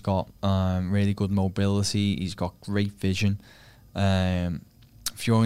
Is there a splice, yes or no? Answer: no